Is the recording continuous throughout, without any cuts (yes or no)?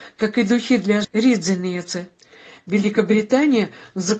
no